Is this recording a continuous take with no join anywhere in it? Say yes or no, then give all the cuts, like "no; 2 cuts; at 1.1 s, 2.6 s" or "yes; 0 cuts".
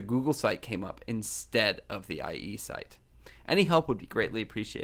yes; 0 cuts